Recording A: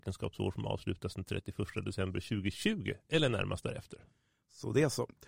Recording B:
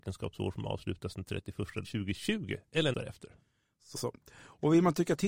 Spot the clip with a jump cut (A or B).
B